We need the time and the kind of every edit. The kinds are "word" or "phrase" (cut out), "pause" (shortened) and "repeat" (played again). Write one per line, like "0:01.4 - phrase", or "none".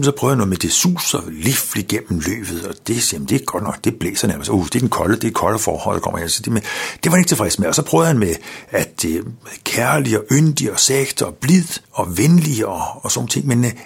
0:11.8 - pause